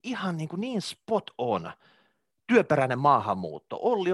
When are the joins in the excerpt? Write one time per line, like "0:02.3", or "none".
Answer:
none

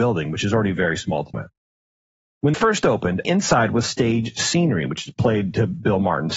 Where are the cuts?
0:01.3
0:02.5
0:03.2
0:03.8

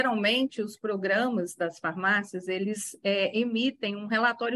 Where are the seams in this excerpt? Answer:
none

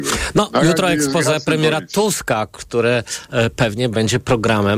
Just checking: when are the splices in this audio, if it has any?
none

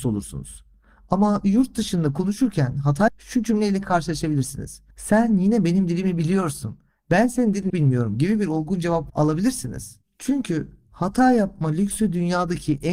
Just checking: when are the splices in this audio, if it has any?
0:03.1
0:04.9
0:07.7

